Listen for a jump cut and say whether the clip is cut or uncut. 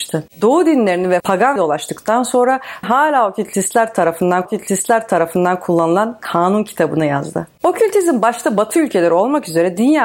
cut